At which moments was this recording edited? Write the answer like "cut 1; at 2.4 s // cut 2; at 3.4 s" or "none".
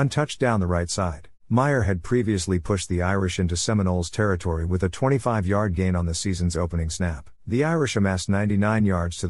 cut 1; at 1.4 s // cut 2; at 7.4 s